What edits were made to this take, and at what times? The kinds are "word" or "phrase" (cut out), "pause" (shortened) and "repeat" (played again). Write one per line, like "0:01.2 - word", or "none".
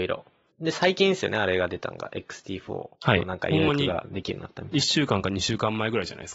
0:02.9 - pause